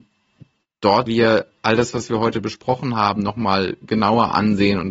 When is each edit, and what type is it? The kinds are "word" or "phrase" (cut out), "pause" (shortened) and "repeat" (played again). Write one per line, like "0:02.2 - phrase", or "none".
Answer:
0:01.1 - word